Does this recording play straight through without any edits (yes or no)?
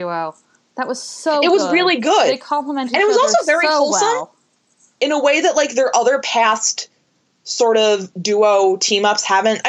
yes